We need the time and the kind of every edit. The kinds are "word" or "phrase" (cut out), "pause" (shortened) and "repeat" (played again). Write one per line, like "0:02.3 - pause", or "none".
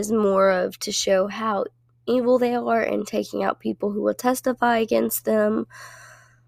none